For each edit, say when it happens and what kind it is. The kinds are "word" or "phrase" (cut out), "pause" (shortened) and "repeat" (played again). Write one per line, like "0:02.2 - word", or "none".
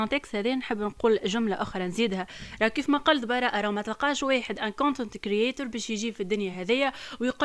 none